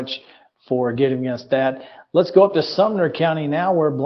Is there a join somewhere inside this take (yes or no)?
no